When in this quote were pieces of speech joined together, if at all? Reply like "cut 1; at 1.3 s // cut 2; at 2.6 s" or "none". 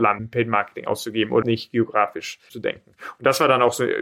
cut 1; at 1.4 s